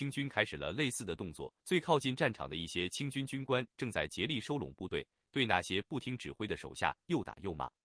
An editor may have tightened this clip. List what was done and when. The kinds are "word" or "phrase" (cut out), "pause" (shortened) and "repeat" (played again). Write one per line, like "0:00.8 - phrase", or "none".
0:01.6 - pause